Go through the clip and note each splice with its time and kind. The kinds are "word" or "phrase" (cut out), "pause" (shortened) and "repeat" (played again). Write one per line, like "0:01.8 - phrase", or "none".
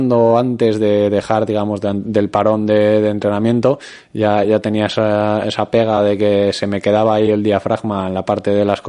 none